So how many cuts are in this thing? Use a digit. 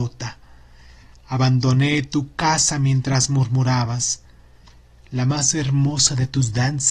0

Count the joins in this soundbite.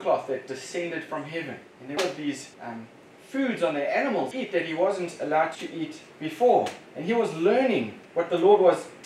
7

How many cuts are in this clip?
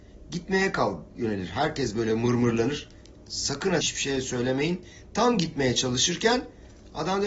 1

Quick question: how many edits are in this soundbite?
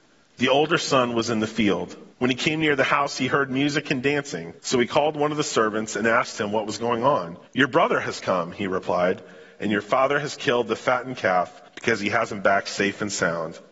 4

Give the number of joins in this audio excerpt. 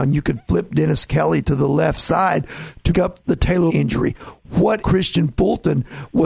4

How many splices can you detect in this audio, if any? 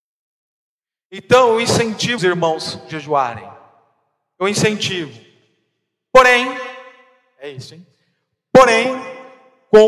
1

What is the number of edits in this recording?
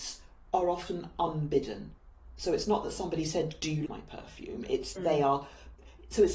2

